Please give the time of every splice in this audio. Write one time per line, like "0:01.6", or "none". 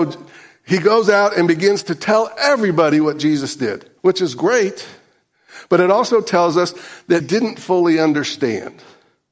0:04.0
0:07.2